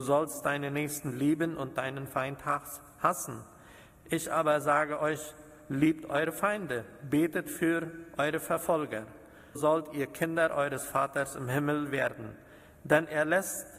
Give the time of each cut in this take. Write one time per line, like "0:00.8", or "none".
0:09.6